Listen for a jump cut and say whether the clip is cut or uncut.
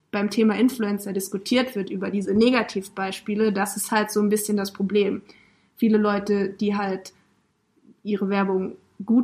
uncut